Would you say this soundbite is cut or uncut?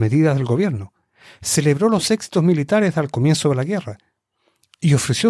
uncut